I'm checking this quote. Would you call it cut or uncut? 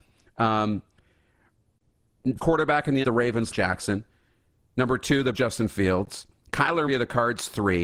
cut